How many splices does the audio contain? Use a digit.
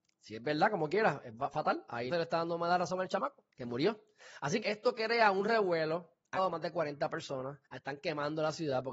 5